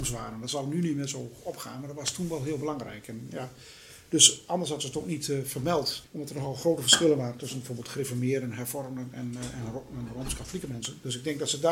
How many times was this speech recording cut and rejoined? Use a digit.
1